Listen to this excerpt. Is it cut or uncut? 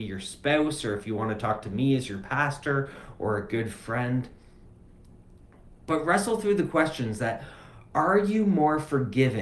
uncut